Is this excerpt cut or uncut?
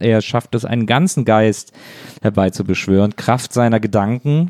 uncut